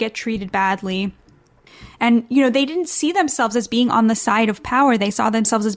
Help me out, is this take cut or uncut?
uncut